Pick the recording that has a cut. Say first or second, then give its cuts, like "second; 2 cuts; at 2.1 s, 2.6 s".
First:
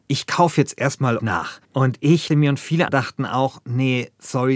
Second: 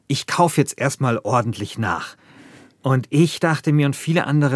first; 4 cuts; at 1.2 s, 1.6 s, 2.3 s, 2.9 s